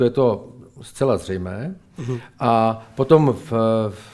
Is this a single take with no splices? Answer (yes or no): yes